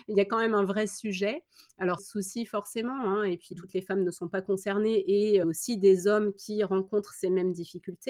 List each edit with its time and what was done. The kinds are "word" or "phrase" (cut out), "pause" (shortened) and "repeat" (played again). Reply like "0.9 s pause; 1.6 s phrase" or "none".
2.0 s phrase; 3.5 s word; 5.4 s phrase